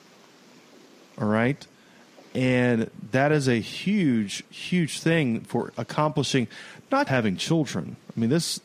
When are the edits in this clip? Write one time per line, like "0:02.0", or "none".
0:07.1